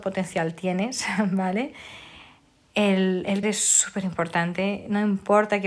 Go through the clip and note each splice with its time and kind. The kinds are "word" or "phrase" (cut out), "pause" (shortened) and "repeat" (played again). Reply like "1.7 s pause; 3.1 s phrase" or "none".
3.4 s word